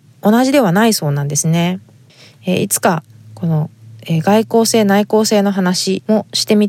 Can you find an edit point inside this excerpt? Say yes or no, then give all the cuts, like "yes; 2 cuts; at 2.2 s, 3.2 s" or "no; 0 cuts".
no; 0 cuts